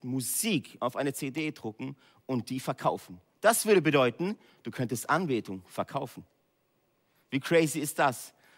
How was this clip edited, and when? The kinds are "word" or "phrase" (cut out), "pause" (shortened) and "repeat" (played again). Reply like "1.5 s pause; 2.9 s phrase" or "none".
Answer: none